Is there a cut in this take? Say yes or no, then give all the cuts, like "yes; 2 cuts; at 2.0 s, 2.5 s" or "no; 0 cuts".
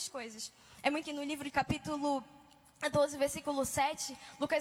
yes; 2 cuts; at 1.0 s, 1.5 s